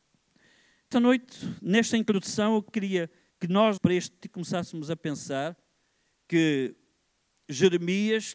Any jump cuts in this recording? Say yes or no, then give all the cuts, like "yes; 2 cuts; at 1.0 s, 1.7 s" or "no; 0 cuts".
yes; 4 cuts; at 0.9 s, 3.3 s, 3.8 s, 4.2 s